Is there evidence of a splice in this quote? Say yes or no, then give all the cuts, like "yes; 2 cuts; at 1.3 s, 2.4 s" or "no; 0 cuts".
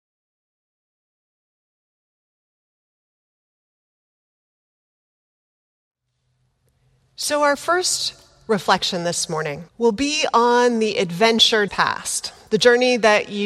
yes; 2 cuts; at 9.7 s, 11.7 s